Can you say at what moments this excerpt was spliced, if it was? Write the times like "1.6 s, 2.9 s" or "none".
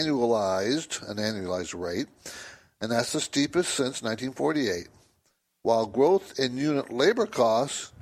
none